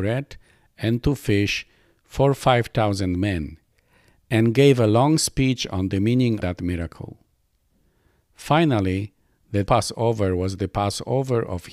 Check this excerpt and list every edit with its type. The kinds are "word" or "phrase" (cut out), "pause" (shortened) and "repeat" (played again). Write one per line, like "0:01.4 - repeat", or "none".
0:06.4 - word
0:09.7 - word